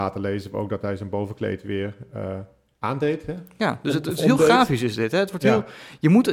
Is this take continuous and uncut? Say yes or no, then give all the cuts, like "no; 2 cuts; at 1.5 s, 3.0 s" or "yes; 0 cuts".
yes; 0 cuts